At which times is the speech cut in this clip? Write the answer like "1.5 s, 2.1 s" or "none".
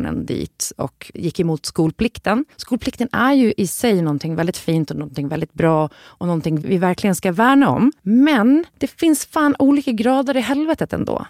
2.5 s